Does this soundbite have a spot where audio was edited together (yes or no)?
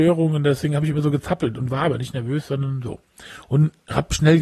no